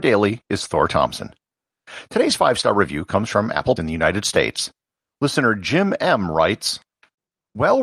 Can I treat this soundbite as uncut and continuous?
no; 1 cut; at 3.8 s

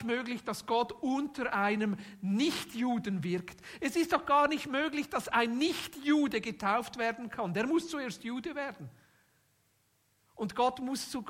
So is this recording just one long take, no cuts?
yes; 0 cuts

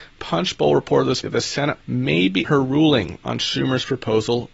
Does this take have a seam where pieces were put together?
yes; 3 cuts; at 1.2 s, 1.8 s, 2.4 s

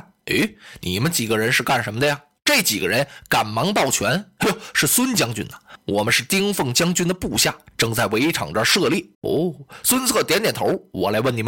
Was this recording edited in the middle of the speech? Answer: yes; 1 cut; at 9.1 s

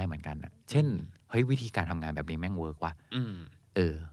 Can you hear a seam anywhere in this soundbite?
yes; 1 cut; at 1.2 s

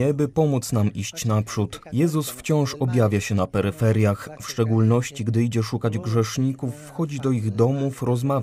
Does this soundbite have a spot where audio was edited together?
no; 0 cuts

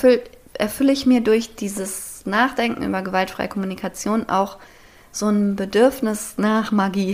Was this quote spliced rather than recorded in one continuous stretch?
no; 0 cuts

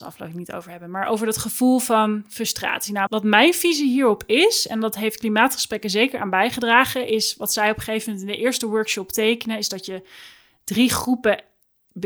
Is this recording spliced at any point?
yes; 1 cut; at 3.1 s

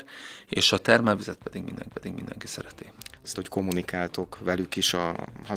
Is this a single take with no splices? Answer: no; 2 cuts; at 1.9 s, 3.3 s

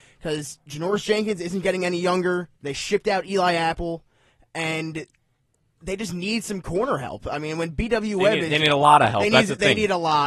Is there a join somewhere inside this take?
yes; 1 cut; at 2.6 s

